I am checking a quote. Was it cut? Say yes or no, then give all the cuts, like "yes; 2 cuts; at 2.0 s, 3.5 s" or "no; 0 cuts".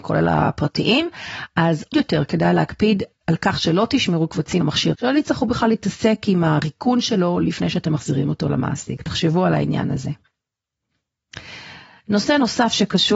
yes; 4 cuts; at 1.9 s, 3.1 s, 4.6 s, 4.9 s